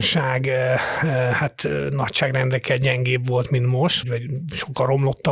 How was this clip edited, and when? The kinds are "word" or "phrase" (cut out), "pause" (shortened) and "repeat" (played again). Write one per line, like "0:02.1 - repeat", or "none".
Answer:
0:04.0 - word